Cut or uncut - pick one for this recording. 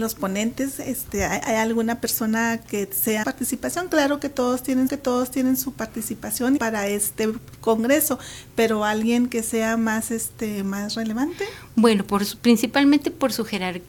cut